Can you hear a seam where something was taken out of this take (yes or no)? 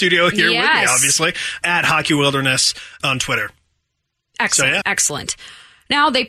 yes